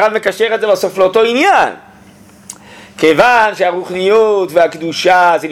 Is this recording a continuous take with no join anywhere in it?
yes; 0 cuts

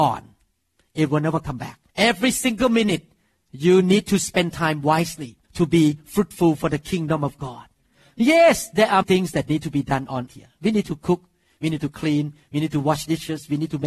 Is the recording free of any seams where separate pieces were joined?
no; 4 cuts; at 1.9 s, 5.4 s, 9.0 s, 10.3 s

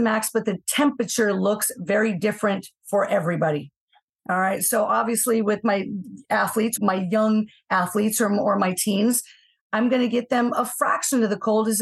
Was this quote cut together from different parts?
yes; 2 cuts; at 2.8 s, 6.8 s

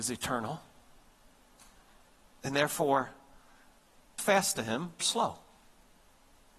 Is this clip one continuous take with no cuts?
no; 2 cuts; at 4.2 s, 5.0 s

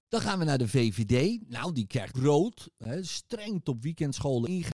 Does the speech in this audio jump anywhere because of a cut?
yes; 2 cuts; at 2.1 s, 3.6 s

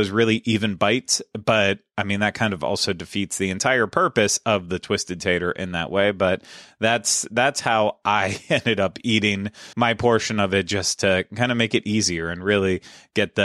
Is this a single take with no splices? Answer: no; 1 cut; at 9.7 s

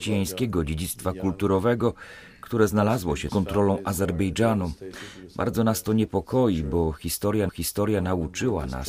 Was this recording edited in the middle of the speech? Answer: yes; 2 cuts; at 3.3 s, 7.5 s

